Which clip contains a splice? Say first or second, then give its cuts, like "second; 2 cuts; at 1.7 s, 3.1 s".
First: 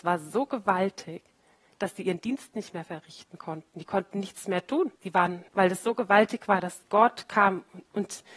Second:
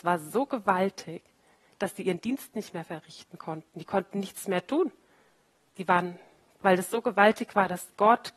first; 2 cuts; at 5.0 s, 5.5 s